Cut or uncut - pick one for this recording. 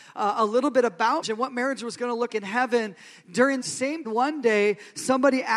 cut